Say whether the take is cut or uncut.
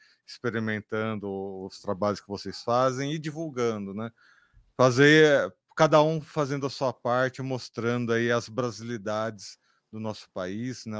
uncut